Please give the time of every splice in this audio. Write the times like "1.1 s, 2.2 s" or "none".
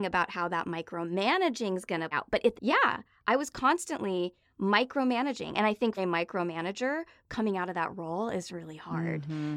2.1 s, 2.5 s, 6.0 s